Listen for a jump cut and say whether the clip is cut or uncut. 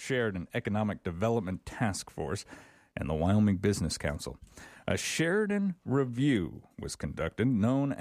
uncut